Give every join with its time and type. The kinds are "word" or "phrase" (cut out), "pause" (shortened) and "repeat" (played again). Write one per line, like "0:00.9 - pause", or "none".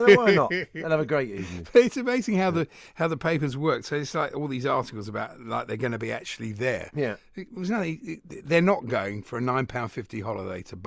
none